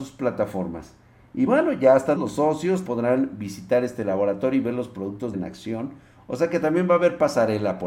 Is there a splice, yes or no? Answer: yes